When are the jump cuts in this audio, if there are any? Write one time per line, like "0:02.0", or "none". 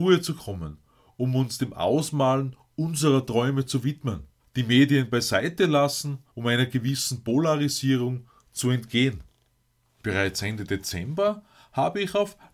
0:04.4
0:06.3
0:09.6